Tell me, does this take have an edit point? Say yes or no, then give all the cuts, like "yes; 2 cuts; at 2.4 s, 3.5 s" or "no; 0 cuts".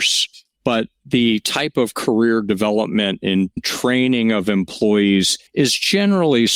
yes; 1 cut; at 5.5 s